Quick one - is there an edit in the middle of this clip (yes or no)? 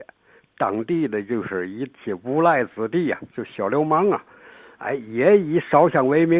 no